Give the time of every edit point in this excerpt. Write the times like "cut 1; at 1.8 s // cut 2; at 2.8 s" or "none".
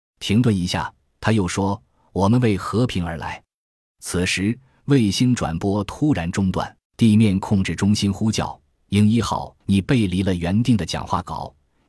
cut 1; at 6.9 s // cut 2; at 9.6 s